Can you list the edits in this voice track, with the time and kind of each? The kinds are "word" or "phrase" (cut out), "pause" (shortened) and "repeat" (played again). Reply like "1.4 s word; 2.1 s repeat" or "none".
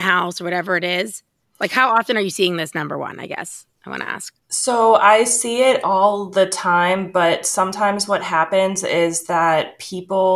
4.4 s pause